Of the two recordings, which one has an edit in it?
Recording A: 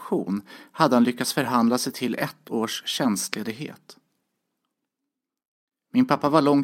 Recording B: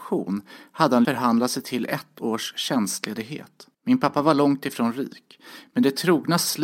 B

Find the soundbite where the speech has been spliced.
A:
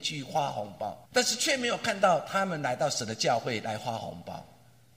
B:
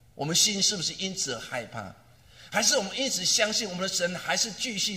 A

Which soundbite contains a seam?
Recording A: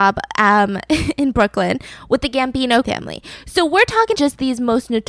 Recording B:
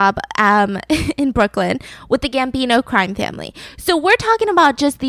A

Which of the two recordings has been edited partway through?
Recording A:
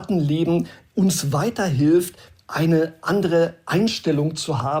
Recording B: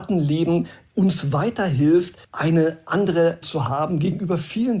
B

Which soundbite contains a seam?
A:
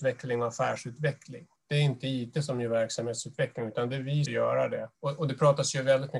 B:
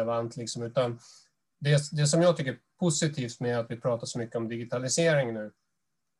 A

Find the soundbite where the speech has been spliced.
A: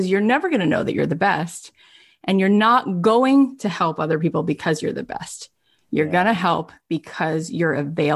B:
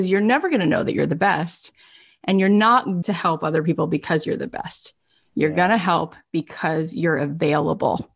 B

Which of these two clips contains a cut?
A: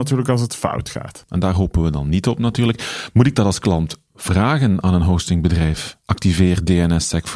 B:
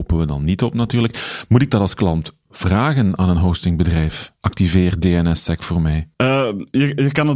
B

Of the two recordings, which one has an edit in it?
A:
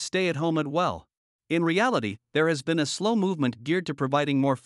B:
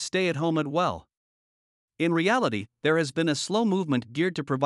A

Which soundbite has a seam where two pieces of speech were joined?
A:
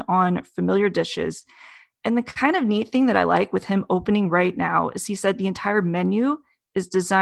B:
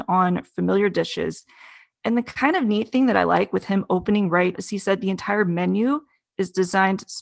B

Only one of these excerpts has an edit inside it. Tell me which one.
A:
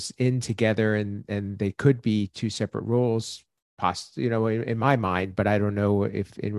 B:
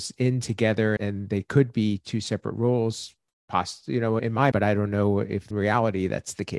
B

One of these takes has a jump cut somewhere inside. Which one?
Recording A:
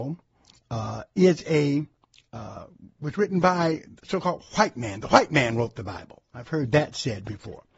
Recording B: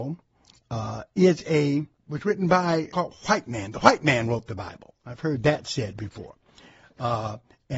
B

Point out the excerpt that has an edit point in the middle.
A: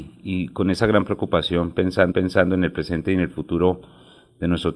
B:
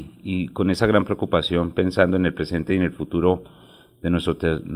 A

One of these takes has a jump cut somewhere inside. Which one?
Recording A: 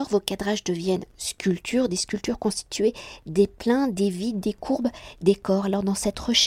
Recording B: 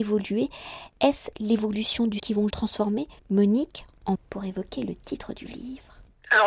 B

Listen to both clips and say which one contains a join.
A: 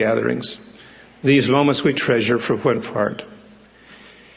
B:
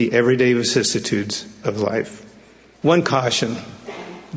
A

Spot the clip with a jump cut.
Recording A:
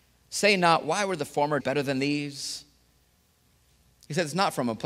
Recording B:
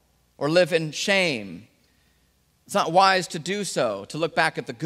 A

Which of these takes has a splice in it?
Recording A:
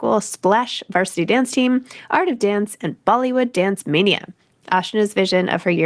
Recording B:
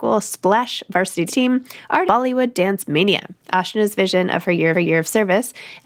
B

